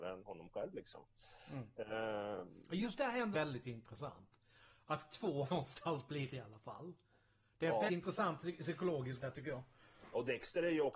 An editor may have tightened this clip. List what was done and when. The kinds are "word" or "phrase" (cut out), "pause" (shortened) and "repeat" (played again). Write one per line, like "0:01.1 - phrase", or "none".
0:03.3 - word
0:05.5 - word
0:06.3 - word
0:07.9 - word
0:09.2 - word